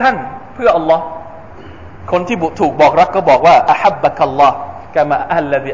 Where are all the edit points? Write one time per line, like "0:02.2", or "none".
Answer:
none